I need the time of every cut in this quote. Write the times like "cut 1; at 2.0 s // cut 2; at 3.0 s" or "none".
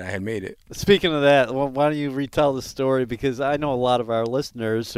none